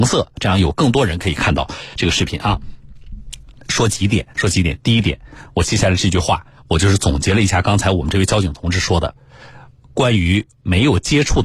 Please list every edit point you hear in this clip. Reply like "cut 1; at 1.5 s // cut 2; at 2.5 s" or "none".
cut 1; at 4.3 s